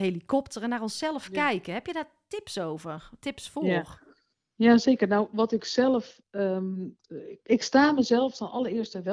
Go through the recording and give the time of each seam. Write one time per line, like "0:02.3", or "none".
0:07.5